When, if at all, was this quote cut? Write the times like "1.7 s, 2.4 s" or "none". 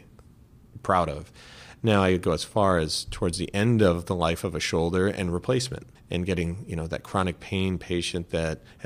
5.9 s